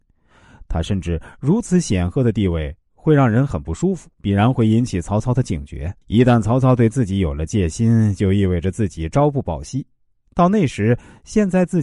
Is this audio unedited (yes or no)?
no